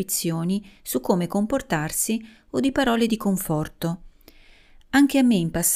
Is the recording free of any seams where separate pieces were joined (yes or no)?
yes